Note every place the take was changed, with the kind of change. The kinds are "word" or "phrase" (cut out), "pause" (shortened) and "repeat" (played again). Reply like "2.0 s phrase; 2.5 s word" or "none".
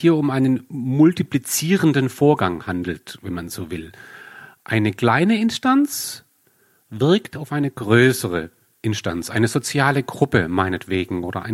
none